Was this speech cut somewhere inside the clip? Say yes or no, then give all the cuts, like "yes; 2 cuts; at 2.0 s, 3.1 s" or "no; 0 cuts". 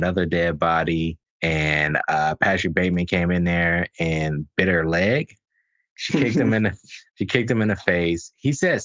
yes; 2 cuts; at 1.3 s, 7.1 s